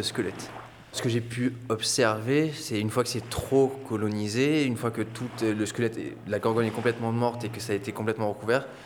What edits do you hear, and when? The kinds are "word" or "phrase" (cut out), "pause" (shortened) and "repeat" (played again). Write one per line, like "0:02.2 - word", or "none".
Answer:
none